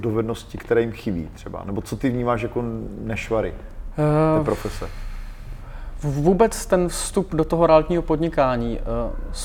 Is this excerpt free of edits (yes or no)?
yes